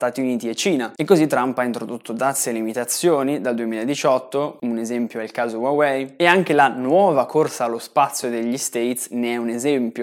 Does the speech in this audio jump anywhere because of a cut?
no; 0 cuts

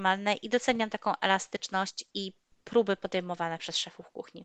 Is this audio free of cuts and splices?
yes; 0 cuts

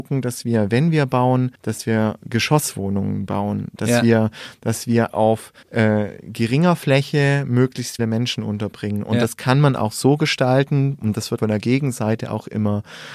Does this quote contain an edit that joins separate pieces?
yes; 5 cuts; at 1.5 s, 5.1 s, 5.6 s, 8.0 s, 11.4 s

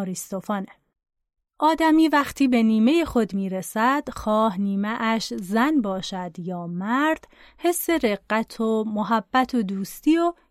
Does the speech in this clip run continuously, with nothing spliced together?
yes; 0 cuts

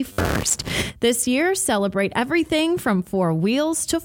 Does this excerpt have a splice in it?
no; 0 cuts

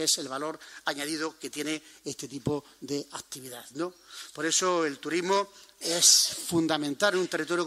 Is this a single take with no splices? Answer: yes; 0 cuts

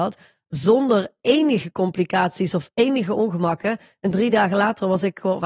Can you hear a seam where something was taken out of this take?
no; 0 cuts

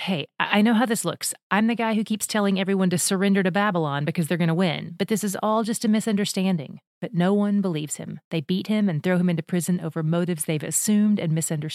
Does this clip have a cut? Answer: yes; 2 cuts; at 6.9 s, 8.2 s

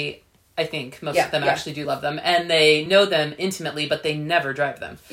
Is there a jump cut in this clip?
no; 0 cuts

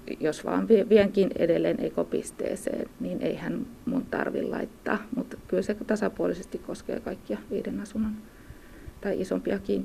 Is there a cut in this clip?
yes; 1 cut; at 2.9 s

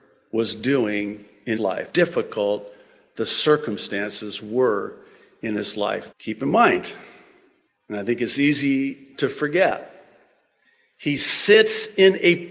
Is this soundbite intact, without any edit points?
no; 3 cuts; at 1.6 s, 1.9 s, 6.1 s

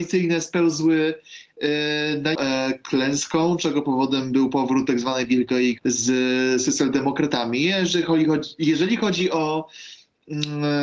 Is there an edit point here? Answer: yes; 2 cuts; at 2.3 s, 5.8 s

